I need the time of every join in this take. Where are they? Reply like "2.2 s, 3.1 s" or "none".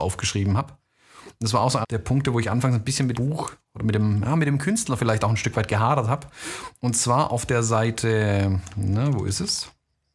1.8 s, 3.1 s